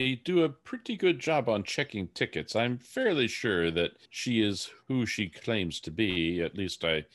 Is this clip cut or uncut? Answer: cut